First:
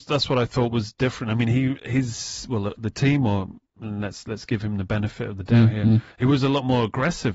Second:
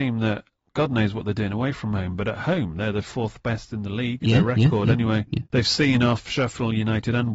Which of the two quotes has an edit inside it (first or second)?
first